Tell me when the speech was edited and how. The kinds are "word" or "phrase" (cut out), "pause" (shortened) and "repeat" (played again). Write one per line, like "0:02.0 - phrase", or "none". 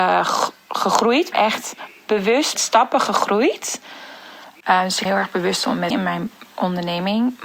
0:01.3 - word
0:02.6 - word
0:05.1 - word
0:05.9 - word

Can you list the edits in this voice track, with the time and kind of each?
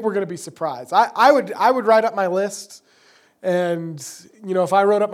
none

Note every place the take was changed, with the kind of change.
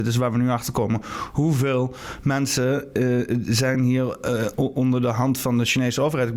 none

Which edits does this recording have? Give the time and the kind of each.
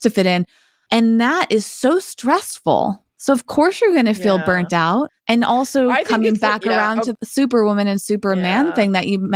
0:05.2 - pause

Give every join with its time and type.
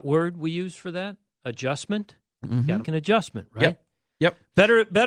0:02.8 - word

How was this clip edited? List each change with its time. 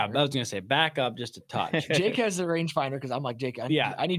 none

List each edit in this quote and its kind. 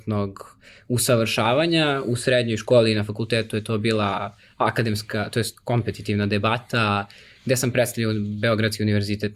none

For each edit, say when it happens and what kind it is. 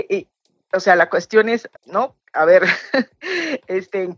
0:01.8 - pause

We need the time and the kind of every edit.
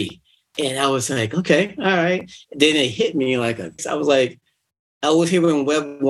0:03.8 - phrase

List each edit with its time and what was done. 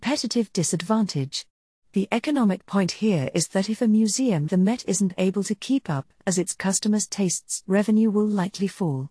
0:04.5 - word
0:07.6 - word

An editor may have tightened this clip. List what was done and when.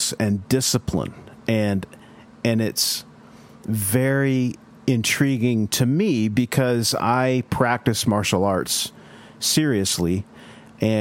none

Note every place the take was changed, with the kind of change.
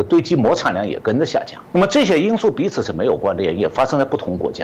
0:01.6 - pause

